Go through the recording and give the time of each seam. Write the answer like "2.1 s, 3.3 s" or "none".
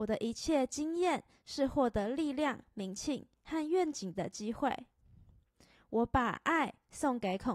none